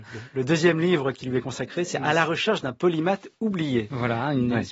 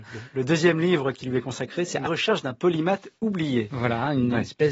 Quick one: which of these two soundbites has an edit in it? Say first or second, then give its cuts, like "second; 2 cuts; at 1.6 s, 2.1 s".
second; 1 cut; at 2.1 s